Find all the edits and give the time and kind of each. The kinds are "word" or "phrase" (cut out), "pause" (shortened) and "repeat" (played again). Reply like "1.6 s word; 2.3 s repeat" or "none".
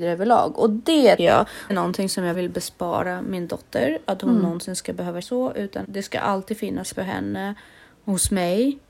1.2 s word; 1.7 s word; 2.3 s word; 5.2 s word; 5.8 s word; 6.9 s word